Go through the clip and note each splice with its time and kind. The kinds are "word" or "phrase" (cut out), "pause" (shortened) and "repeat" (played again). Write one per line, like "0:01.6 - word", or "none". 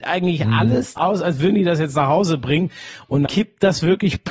0:01.0 - word
0:03.3 - word